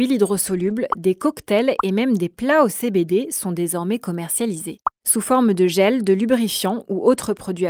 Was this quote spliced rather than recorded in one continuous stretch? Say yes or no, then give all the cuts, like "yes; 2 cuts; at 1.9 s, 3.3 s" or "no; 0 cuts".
no; 0 cuts